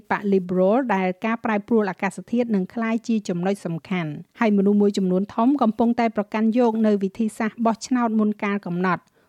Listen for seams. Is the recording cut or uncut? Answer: cut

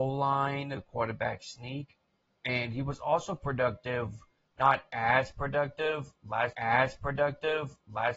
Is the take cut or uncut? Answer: cut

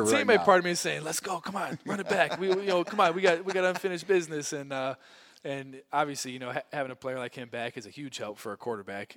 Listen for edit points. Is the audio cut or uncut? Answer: uncut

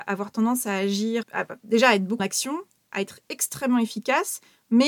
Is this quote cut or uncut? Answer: cut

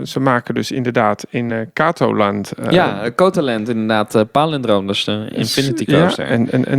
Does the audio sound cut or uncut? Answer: uncut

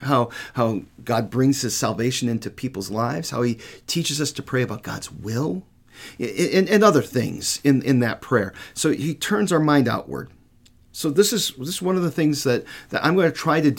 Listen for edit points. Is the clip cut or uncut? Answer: uncut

